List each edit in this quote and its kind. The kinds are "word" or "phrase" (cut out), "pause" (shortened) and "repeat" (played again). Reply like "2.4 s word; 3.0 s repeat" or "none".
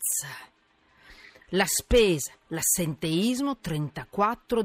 none